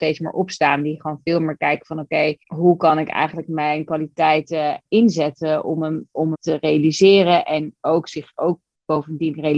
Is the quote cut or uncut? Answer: cut